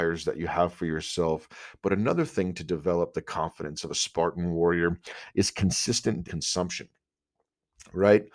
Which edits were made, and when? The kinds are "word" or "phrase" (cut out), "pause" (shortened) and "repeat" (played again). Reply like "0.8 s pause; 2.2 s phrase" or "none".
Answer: 6.2 s word